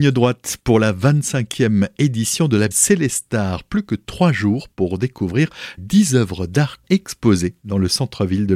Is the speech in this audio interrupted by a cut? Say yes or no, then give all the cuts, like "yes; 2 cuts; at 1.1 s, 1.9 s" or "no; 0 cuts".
yes; 3 cuts; at 2.7 s, 5.8 s, 6.8 s